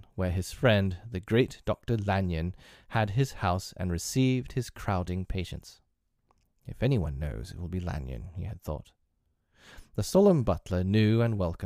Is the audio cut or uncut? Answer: uncut